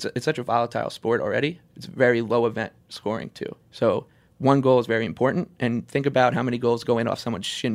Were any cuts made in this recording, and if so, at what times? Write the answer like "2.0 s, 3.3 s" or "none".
3.6 s